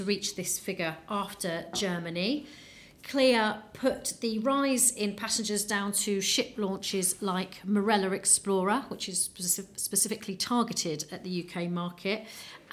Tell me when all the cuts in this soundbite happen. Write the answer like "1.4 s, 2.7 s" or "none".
none